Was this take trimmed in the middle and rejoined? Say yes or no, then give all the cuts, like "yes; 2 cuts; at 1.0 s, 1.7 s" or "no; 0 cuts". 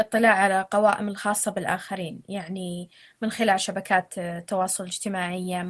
no; 0 cuts